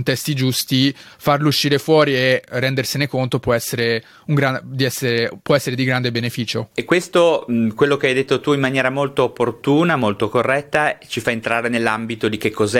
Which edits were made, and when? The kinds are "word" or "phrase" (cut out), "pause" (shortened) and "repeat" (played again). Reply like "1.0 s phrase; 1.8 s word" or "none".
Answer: 6.7 s pause